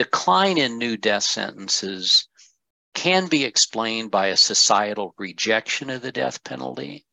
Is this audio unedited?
yes; 0 cuts

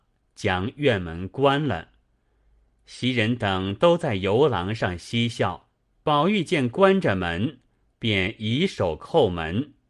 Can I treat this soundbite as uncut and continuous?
no; 1 cut; at 5.9 s

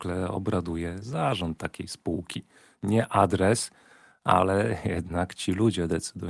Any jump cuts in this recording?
no; 0 cuts

